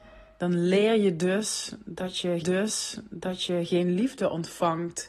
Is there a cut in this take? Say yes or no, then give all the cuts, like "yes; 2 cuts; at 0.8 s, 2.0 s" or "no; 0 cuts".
yes; 1 cut; at 2.4 s